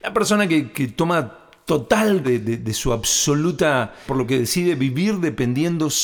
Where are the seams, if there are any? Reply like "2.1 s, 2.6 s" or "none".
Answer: 2.2 s, 4.1 s